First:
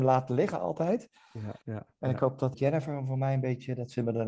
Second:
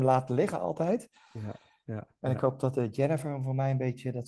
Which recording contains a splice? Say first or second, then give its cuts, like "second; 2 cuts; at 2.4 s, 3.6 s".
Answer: first; 2 cuts; at 1.6 s, 2.5 s